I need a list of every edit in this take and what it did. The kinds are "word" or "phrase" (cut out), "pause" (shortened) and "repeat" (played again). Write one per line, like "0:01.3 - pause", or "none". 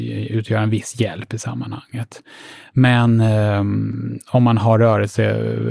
none